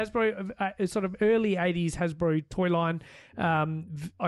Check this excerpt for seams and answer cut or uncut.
uncut